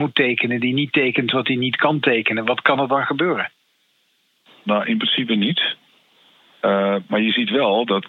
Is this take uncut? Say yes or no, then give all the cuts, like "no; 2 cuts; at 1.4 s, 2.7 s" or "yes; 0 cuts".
yes; 0 cuts